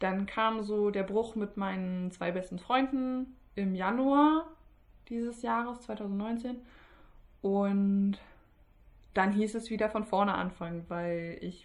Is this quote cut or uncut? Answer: uncut